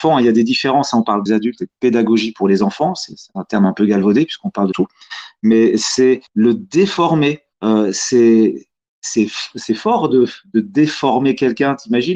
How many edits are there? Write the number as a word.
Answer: four